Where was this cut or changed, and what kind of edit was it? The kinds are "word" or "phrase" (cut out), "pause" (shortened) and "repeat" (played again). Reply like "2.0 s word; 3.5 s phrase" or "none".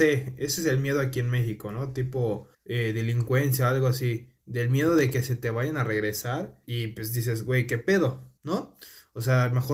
2.5 s pause; 6.6 s pause; 8.4 s pause